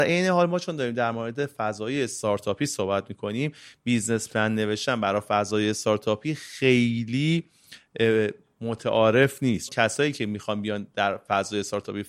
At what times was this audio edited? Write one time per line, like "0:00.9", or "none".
0:09.7